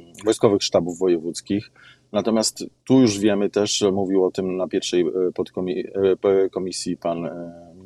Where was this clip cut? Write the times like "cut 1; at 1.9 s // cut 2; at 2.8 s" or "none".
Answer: none